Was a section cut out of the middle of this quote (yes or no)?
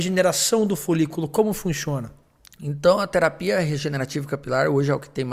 no